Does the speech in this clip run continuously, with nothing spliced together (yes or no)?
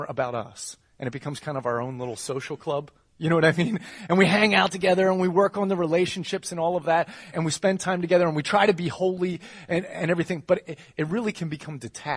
no